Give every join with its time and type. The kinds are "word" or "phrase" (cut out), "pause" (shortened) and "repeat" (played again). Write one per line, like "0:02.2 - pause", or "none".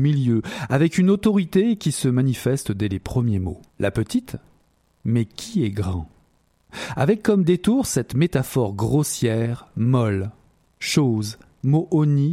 0:03.7 - pause